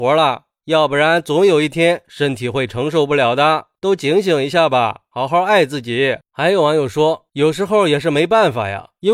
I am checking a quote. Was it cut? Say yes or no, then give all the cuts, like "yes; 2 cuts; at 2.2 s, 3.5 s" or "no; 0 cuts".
yes; 1 cut; at 6.2 s